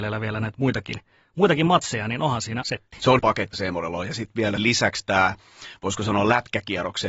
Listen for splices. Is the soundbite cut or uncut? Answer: cut